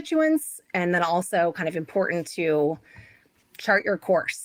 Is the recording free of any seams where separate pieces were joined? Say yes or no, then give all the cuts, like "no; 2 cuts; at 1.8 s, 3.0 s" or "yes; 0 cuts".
yes; 0 cuts